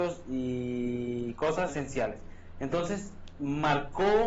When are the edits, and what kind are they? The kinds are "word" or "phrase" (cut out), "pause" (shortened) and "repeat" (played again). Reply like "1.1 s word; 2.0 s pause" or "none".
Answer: 1.7 s word

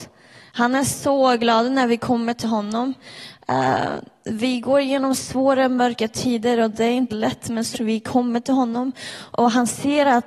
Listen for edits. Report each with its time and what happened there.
7.1 s word; 7.7 s word

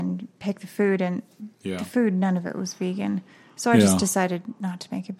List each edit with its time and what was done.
none

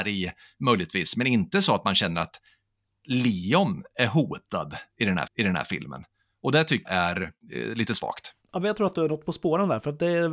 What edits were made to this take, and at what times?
5.3 s repeat; 6.9 s word; 7.4 s pause; 8.4 s pause

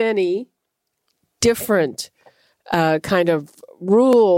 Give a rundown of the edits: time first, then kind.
none

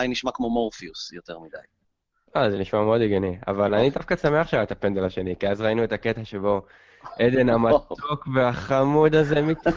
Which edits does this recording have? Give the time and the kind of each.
none

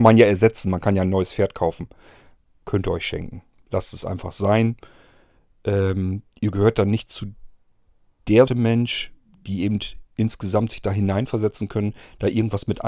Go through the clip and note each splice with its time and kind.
6.3 s pause; 8.5 s word

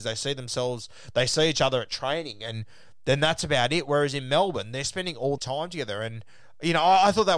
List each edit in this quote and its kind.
5.4 s word

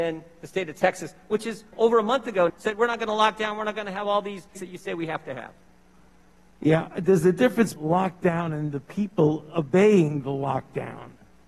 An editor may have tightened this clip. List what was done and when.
1.7 s word; 2.5 s word; 4.5 s word; 7.8 s word

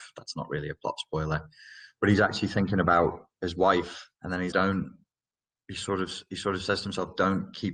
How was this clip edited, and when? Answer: 4.1 s pause; 4.5 s word

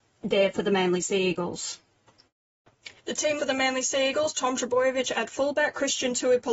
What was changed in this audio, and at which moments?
3.0 s pause; 3.4 s word

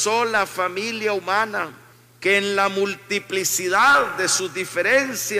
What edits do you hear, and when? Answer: 1.9 s pause

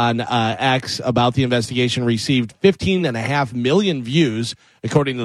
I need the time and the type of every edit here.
none

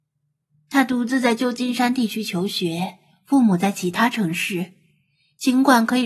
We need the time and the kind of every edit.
none

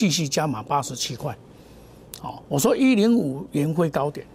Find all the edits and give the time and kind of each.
2.4 s pause

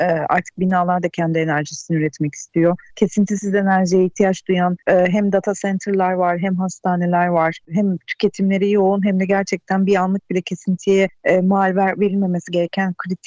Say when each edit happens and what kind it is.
2.9 s pause; 4.8 s pause; 7.6 s pause

